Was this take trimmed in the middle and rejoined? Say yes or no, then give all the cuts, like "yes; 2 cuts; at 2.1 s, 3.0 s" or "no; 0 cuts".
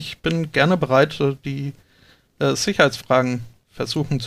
no; 0 cuts